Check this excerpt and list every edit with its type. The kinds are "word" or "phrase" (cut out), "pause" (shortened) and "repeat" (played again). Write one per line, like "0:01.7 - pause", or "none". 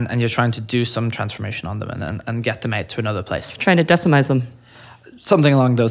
none